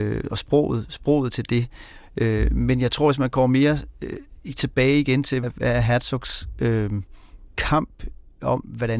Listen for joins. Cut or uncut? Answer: cut